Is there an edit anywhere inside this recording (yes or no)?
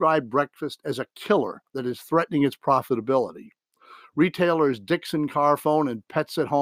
no